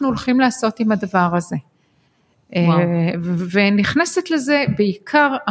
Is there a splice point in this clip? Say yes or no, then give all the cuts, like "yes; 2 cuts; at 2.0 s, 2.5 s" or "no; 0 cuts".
no; 0 cuts